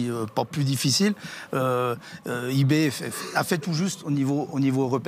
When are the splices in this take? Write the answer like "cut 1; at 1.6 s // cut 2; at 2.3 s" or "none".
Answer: none